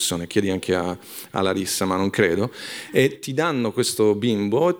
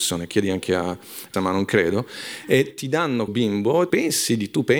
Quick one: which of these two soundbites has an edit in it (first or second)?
second